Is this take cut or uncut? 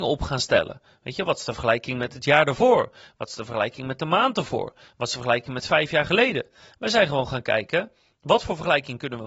uncut